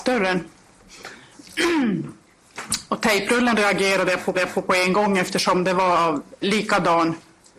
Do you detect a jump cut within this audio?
yes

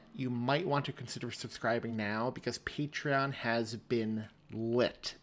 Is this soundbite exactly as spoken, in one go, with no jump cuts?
yes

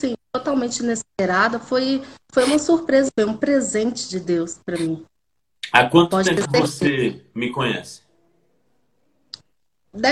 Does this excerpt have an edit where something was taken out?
yes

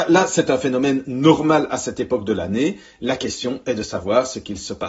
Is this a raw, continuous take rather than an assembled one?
yes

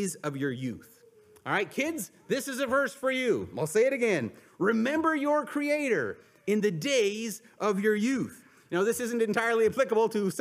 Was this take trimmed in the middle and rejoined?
no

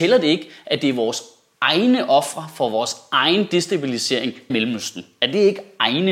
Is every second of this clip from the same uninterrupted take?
no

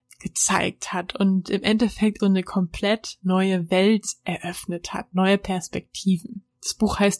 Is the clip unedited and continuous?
no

